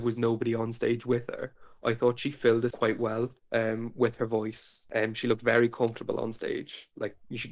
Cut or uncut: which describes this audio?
cut